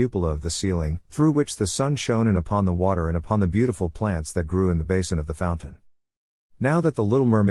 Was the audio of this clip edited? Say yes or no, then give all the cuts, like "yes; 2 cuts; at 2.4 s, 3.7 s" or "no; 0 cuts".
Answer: yes; 1 cut; at 1.1 s